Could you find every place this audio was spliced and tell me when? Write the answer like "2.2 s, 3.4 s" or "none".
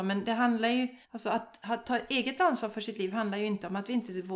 1.0 s